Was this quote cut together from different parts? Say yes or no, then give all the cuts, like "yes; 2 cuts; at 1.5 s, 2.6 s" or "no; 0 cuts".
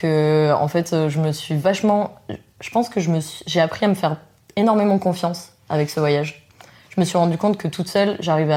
no; 0 cuts